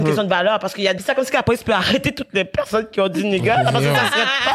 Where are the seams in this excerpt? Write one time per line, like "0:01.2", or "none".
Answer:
0:01.0